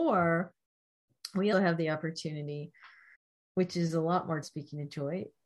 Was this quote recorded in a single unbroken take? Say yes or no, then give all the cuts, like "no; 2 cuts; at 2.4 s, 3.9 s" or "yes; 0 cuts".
no; 3 cuts; at 1.5 s, 3.1 s, 4.4 s